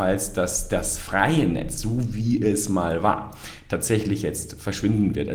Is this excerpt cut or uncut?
uncut